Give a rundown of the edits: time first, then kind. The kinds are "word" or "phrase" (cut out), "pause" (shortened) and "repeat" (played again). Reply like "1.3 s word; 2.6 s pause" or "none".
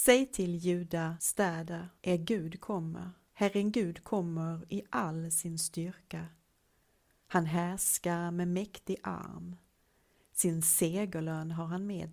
2.0 s pause